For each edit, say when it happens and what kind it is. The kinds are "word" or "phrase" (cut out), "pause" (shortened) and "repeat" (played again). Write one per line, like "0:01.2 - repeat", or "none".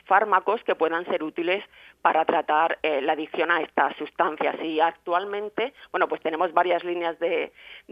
none